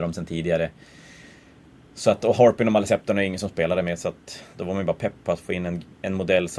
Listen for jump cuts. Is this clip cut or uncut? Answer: uncut